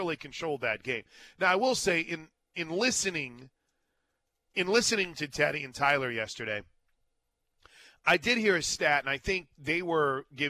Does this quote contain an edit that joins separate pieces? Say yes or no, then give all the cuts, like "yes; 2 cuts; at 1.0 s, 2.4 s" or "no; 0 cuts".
no; 0 cuts